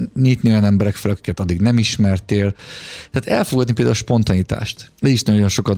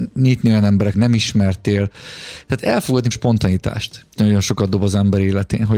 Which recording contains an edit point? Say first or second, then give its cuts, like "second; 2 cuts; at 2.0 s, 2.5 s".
second; 3 cuts; at 0.9 s, 3.1 s, 4.2 s